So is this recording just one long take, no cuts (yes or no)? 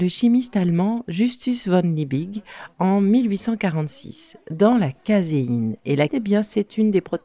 no